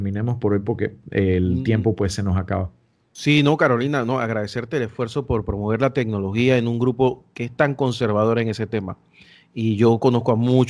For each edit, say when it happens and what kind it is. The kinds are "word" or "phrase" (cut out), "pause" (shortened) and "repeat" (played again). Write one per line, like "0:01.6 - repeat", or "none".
none